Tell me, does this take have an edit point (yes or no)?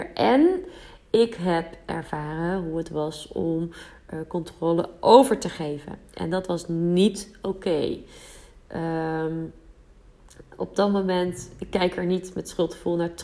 no